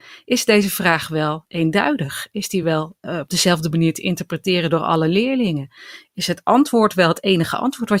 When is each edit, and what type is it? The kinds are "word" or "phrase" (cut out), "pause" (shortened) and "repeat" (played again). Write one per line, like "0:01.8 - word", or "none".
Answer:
none